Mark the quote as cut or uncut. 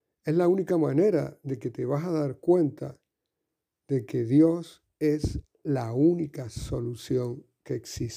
uncut